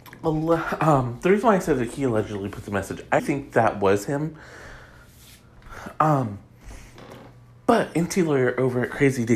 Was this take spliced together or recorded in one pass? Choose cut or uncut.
cut